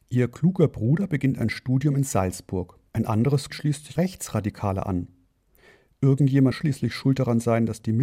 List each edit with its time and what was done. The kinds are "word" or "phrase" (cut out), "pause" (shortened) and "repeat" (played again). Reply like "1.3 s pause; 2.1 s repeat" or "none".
3.5 s word; 4.0 s phrase; 6.5 s word